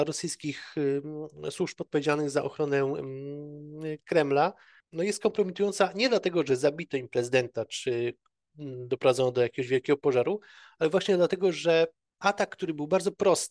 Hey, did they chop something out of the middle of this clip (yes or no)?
no